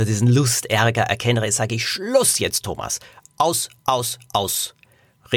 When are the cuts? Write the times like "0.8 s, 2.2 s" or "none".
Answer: none